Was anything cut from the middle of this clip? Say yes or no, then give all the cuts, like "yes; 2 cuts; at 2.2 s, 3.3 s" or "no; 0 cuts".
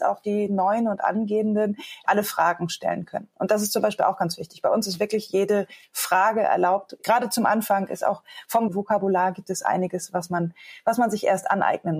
no; 0 cuts